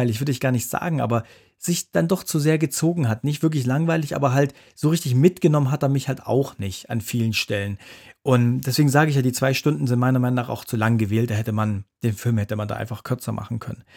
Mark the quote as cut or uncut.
uncut